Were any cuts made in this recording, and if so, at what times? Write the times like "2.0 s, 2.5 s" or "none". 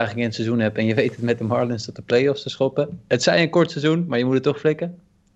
none